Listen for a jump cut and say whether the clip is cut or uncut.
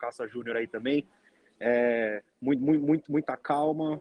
cut